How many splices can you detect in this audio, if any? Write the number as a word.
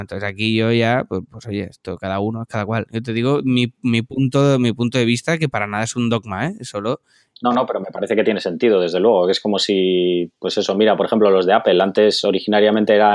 zero